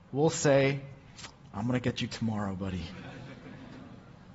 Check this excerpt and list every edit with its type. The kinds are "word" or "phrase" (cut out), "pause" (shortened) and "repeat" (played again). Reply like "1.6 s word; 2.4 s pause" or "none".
none